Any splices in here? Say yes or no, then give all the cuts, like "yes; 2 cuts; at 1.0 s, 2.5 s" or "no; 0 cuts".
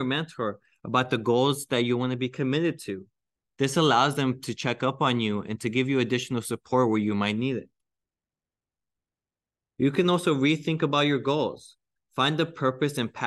no; 0 cuts